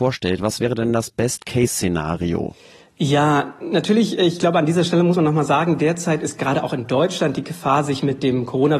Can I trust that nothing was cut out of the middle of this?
yes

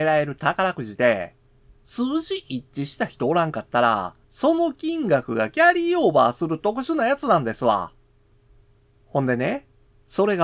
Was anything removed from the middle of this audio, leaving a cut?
yes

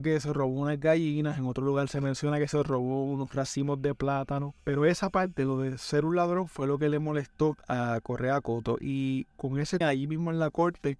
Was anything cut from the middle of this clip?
yes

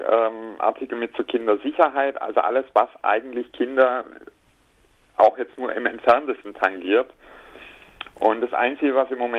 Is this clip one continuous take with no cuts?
yes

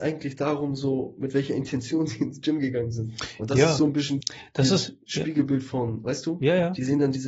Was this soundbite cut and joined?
yes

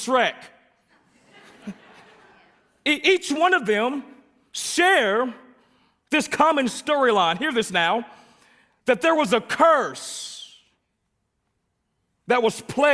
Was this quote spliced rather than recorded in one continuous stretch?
no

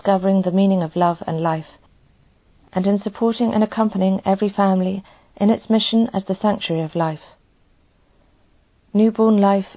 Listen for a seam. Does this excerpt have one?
no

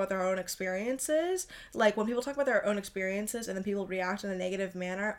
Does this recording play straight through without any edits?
yes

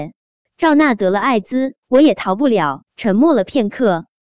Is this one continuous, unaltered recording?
no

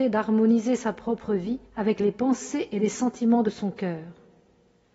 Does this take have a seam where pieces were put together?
yes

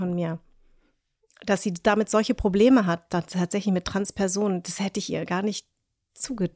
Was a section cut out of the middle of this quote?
no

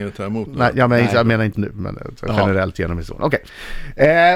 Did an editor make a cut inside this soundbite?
yes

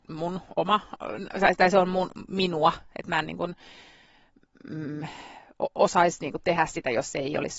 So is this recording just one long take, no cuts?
yes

